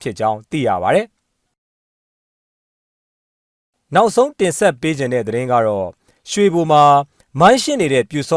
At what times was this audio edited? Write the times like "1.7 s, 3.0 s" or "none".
none

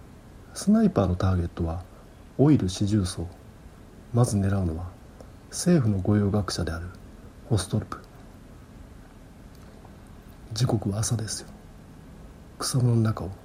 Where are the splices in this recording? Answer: none

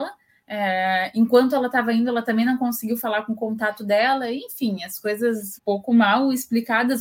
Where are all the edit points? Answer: 5.6 s

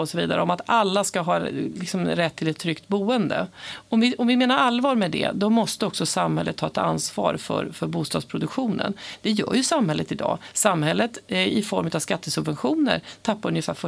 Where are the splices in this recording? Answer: none

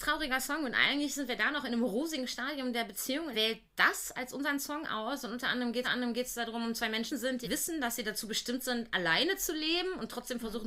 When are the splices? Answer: 3.3 s, 5.8 s, 7.1 s, 7.4 s

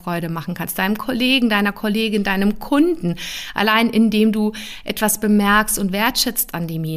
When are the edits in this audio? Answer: none

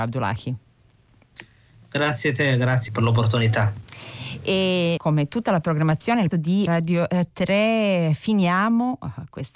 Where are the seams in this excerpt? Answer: 2.9 s, 5.0 s, 6.3 s, 6.7 s

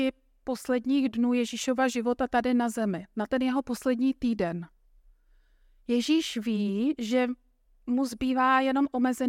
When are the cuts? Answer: none

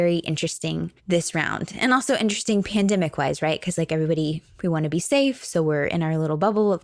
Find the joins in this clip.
1.0 s

